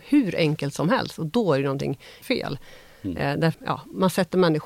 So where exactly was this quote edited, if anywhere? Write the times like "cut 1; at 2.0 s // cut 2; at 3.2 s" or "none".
cut 1; at 2.2 s // cut 2; at 3.5 s